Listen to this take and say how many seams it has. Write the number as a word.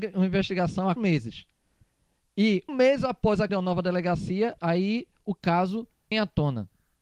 five